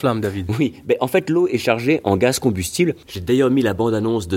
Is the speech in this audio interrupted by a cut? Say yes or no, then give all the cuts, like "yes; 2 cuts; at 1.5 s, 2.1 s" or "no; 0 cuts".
no; 0 cuts